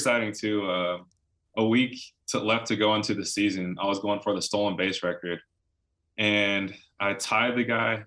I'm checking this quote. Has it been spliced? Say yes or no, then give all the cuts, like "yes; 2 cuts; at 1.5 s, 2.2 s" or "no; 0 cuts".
no; 0 cuts